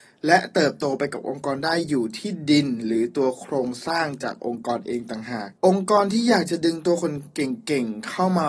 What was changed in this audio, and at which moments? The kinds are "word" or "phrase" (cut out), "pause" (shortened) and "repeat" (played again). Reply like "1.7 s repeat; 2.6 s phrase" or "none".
5.6 s pause

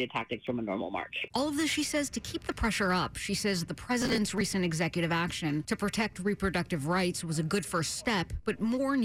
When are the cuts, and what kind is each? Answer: none

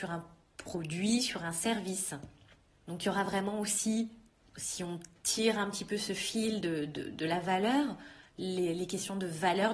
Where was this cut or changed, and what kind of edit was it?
none

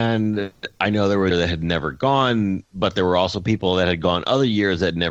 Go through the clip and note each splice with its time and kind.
1.3 s phrase

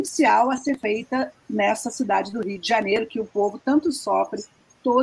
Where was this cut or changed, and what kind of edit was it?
3.1 s word

